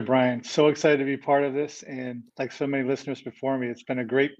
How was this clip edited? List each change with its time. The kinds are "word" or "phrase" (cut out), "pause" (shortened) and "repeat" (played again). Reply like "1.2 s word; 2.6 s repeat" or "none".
2.3 s pause